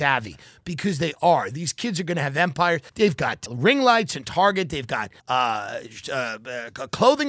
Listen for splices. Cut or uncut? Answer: cut